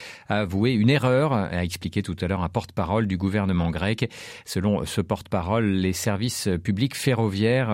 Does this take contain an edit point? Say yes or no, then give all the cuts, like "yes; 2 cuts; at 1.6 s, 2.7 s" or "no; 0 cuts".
no; 0 cuts